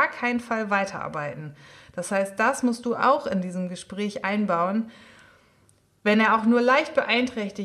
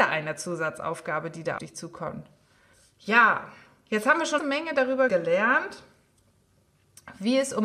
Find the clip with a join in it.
second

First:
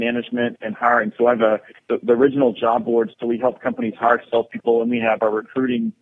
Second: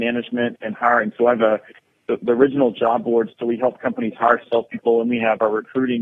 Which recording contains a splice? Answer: first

